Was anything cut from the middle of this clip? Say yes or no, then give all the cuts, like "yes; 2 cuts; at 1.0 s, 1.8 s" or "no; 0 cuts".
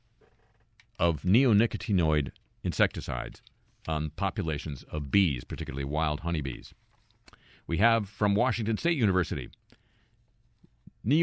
no; 0 cuts